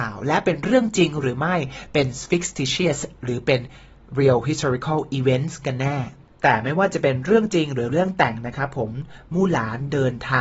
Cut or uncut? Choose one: cut